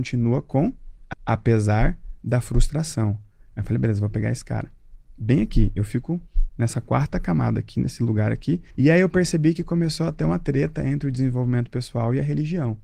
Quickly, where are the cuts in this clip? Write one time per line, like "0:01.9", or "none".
0:01.1
0:08.7